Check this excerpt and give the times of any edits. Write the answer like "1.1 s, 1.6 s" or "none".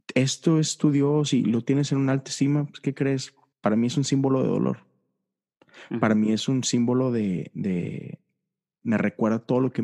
3.5 s